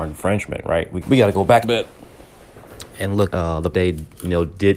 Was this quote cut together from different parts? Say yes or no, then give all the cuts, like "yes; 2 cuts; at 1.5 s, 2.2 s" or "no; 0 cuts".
yes; 4 cuts; at 1.0 s, 1.6 s, 3.3 s, 3.7 s